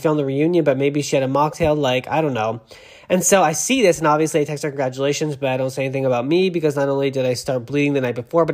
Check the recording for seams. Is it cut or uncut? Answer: uncut